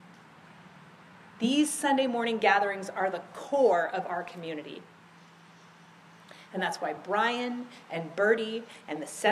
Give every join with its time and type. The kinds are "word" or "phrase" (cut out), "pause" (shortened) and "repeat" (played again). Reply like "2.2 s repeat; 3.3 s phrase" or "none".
none